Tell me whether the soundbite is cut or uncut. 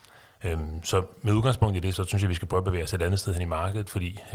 cut